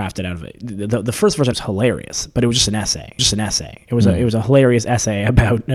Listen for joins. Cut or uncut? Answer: cut